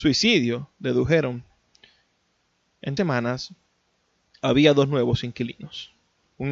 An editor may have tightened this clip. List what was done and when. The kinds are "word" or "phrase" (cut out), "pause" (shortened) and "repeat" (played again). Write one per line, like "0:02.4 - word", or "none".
0:03.0 - word

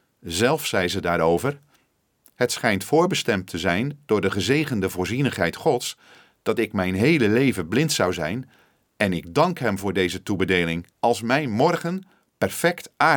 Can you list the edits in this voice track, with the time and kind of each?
0:10.9 - pause

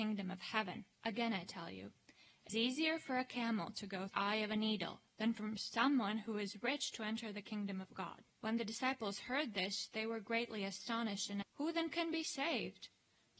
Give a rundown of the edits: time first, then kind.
0:00.9 - pause
0:02.5 - word
0:04.1 - phrase
0:05.1 - pause
0:08.3 - pause
0:11.4 - word

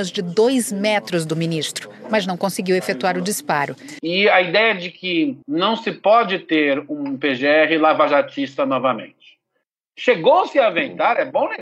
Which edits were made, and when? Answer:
0:05.4 - pause

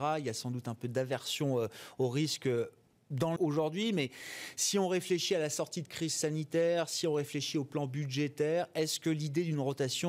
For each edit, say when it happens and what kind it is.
0:03.4 - word

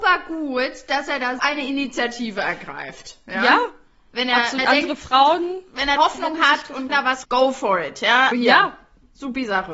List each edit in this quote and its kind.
0:01.4 - word
0:04.6 - word
0:06.0 - word
0:06.9 - word
0:07.2 - word
0:08.3 - word

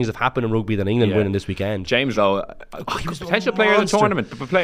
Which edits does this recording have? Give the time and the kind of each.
0:02.1 - word

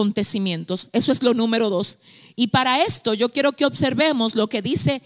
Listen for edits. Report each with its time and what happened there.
none

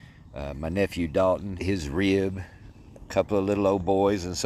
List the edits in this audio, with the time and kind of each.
0:01.6 - phrase
0:03.1 - phrase

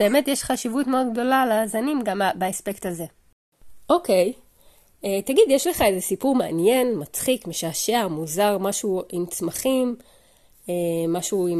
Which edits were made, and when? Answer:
none

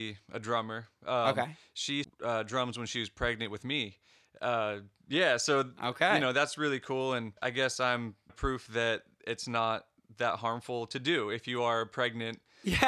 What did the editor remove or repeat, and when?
0:02.0 - phrase
0:07.4 - pause
0:08.3 - phrase

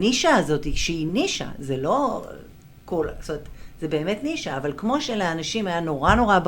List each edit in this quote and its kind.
none

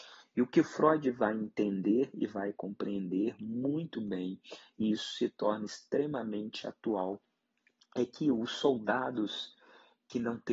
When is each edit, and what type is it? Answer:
none

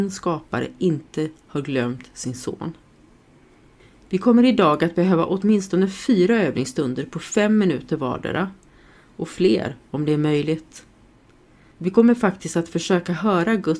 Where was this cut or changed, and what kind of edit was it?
none

